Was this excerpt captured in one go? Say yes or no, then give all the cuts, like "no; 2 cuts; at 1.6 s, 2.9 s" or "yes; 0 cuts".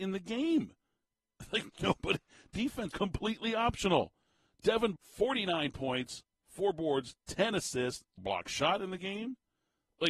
no; 3 cuts; at 2.9 s, 5.0 s, 8.2 s